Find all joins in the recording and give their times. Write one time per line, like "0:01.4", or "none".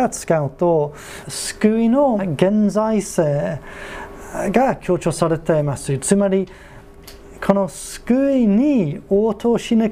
0:01.2
0:02.2